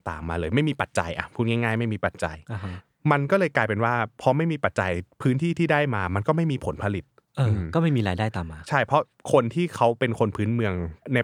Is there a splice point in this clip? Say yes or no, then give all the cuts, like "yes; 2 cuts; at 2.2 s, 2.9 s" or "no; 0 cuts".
no; 0 cuts